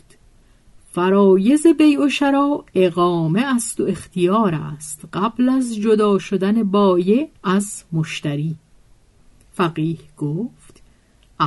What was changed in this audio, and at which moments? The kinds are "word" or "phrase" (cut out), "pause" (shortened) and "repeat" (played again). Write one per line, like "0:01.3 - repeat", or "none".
0:07.4 - pause